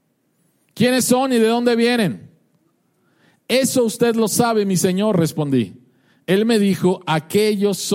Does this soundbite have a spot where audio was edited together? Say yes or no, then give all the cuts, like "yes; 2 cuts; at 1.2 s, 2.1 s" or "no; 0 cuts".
no; 0 cuts